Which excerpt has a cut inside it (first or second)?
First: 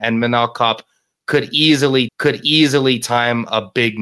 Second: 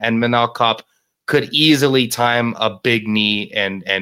first